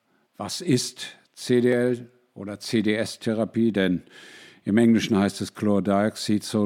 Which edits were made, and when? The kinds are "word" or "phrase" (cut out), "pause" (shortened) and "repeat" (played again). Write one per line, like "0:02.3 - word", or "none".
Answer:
none